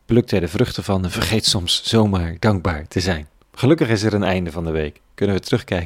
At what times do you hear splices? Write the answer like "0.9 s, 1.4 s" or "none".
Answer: none

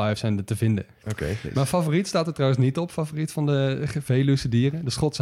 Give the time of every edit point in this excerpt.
none

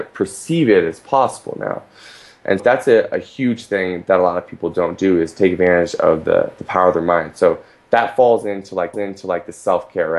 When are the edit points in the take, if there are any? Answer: 2.6 s, 8.9 s

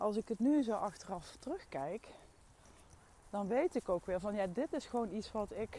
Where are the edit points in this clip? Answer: none

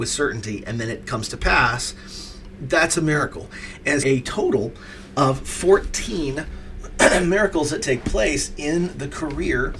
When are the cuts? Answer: 4.0 s

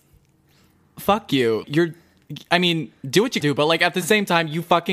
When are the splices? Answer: 1.6 s, 3.4 s

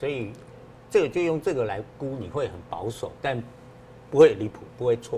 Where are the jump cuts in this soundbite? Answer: 3.2 s

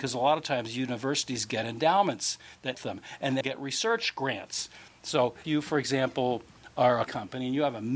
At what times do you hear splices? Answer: 2.7 s, 3.4 s, 5.4 s, 7.1 s

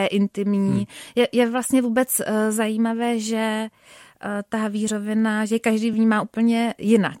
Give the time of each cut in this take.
none

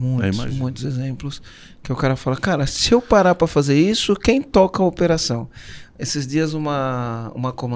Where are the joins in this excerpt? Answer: none

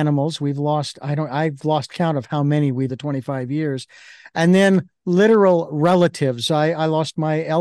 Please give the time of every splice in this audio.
2.9 s

